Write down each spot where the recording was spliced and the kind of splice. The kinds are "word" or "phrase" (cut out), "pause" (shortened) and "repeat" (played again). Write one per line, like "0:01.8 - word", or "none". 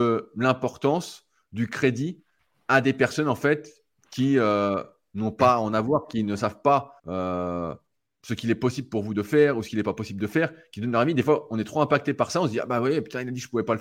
0:07.0 - pause